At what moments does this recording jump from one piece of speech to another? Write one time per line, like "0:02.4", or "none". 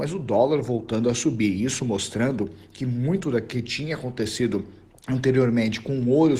0:04.9

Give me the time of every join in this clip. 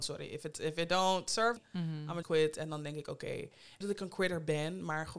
0:01.6
0:02.2
0:03.8

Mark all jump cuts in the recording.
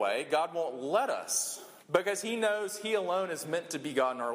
0:01.8

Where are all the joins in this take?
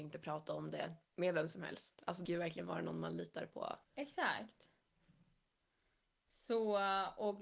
0:01.0
0:02.3
0:03.8

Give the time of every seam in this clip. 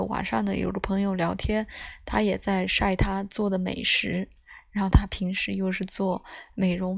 none

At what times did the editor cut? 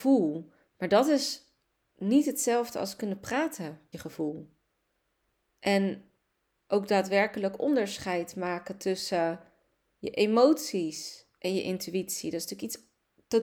0:03.9

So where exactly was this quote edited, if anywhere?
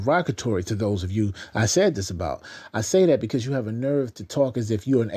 none

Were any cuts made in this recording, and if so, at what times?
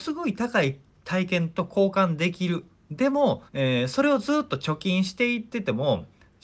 0:03.5

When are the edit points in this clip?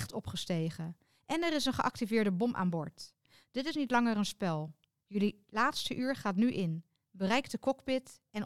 none

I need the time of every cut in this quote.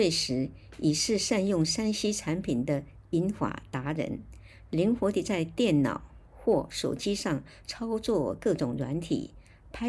0:06.3

